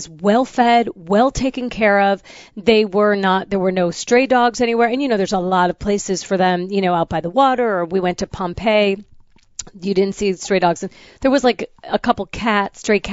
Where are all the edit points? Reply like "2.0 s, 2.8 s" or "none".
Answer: none